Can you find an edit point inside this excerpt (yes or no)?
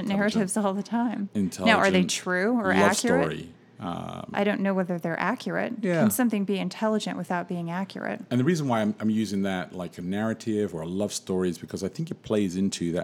no